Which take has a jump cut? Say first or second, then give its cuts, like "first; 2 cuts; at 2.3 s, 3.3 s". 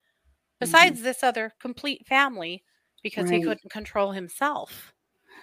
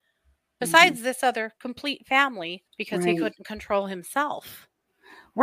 second; 1 cut; at 2.7 s